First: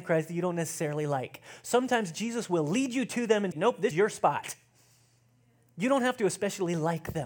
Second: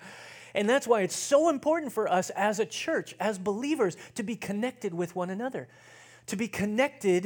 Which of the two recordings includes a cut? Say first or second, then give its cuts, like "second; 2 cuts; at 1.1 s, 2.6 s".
first; 2 cuts; at 3.5 s, 3.9 s